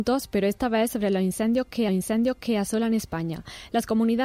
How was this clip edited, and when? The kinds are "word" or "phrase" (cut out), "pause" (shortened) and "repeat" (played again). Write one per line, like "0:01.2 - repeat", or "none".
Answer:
0:01.9 - repeat